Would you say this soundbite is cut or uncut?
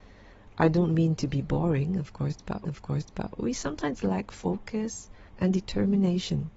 cut